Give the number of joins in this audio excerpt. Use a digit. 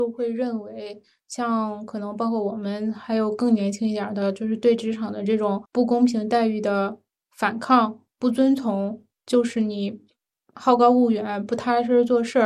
1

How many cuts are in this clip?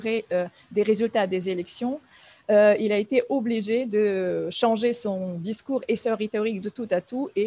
0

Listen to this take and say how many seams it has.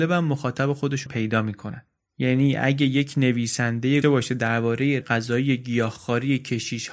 3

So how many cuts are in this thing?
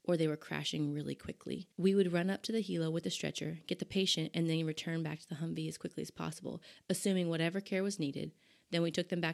1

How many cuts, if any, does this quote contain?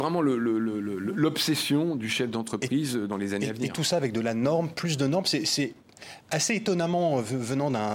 0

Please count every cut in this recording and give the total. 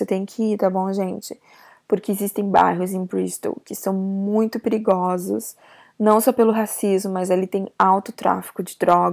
0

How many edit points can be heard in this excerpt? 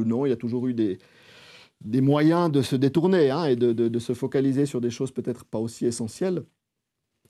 0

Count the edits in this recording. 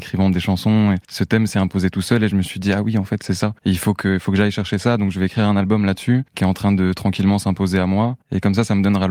4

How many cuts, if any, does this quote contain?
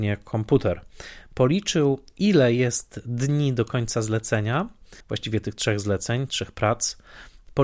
1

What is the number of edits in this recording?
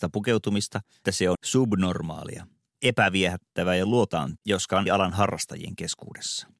4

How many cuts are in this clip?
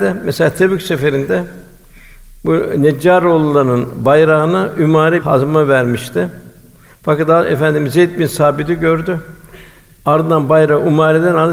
1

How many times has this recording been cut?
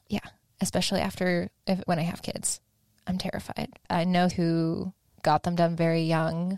3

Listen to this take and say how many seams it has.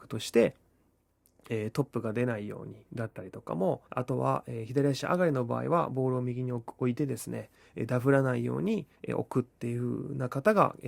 2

